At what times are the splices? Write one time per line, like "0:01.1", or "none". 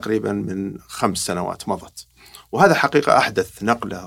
none